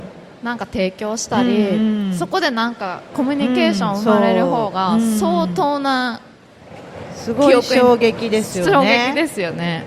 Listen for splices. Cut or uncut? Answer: cut